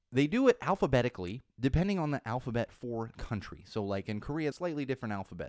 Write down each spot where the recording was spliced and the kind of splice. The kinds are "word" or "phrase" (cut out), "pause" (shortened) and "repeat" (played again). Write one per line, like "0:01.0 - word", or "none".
0:01.5 - pause
0:03.1 - word
0:04.5 - phrase